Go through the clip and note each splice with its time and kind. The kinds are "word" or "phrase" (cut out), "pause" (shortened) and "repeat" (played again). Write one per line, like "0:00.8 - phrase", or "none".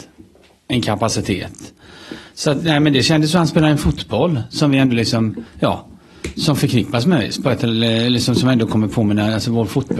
0:05.5 - pause